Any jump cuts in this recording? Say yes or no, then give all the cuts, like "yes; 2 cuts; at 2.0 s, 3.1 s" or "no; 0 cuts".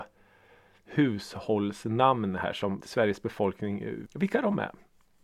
yes; 2 cuts; at 2.8 s, 4.0 s